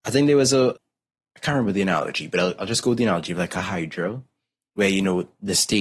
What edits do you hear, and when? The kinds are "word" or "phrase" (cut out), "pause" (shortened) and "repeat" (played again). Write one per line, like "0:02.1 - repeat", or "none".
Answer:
none